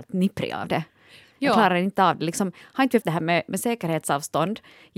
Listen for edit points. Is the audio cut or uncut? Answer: cut